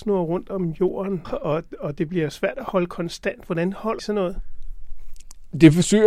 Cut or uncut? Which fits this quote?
cut